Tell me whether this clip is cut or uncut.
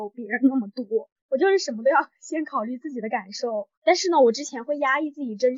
cut